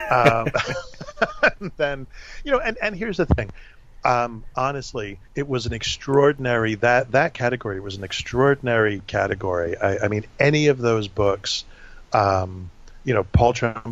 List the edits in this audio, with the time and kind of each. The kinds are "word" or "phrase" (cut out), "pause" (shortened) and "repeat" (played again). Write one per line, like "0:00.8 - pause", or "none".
0:05.2 - pause